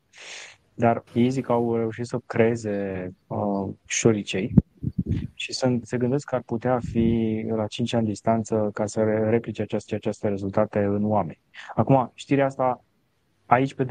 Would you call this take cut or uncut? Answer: cut